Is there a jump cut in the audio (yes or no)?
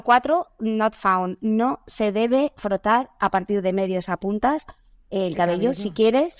no